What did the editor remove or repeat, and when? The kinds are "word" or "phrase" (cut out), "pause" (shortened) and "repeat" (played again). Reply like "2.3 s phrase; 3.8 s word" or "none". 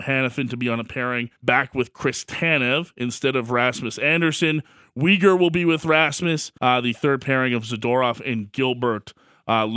1.4 s pause; 6.6 s pause